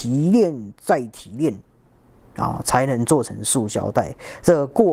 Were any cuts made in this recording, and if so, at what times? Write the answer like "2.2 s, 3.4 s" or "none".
none

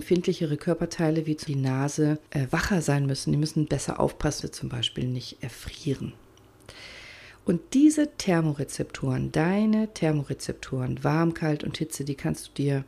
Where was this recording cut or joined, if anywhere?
1.5 s, 2.3 s, 4.4 s

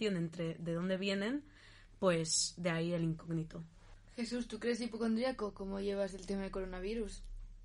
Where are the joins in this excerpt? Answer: none

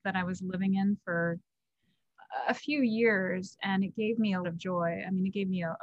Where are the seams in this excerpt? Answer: 4.4 s

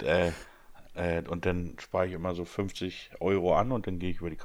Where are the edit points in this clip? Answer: none

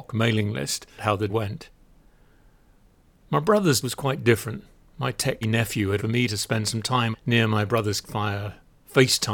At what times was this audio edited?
1.0 s, 1.3 s, 3.8 s, 5.4 s, 6.0 s, 7.1 s, 8.0 s

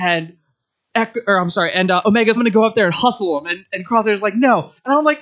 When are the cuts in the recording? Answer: 2.4 s

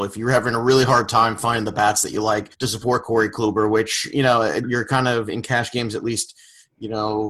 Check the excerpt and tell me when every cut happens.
2.5 s, 4.6 s

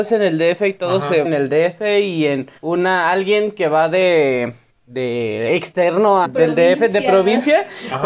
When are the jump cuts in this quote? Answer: 1.2 s, 2.6 s, 4.7 s, 6.2 s

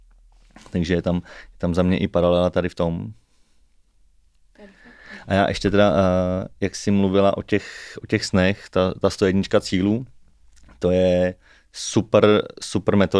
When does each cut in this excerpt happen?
none

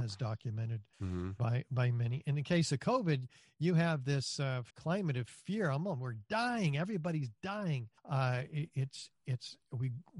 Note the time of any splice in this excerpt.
0.9 s, 4.7 s, 8.0 s

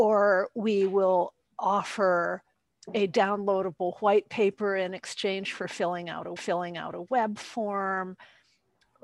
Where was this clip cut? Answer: 6.4 s

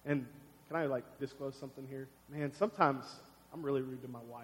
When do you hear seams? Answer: 1.2 s, 2.2 s

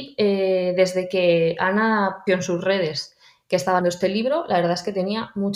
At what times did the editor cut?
2.3 s, 3.8 s

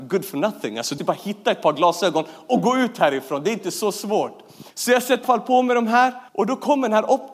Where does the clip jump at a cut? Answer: 1.0 s, 4.7 s, 5.2 s, 6.3 s

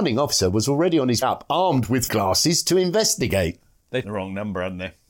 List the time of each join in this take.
1.2 s, 2.1 s, 4.0 s

